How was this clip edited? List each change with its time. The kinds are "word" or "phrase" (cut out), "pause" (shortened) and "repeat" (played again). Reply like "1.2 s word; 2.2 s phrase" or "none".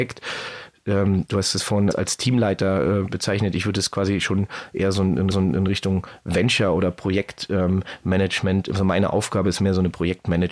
1.9 s word; 5.3 s repeat